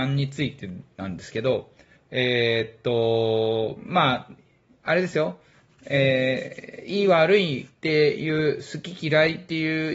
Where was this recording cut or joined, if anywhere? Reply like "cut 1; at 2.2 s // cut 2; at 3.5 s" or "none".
none